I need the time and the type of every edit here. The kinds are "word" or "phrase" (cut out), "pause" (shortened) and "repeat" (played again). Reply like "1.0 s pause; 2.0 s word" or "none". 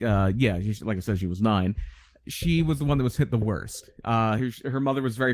none